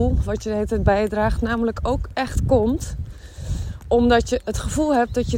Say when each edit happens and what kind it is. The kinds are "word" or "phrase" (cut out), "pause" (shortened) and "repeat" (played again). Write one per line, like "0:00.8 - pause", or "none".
none